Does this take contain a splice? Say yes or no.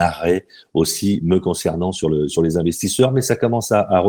no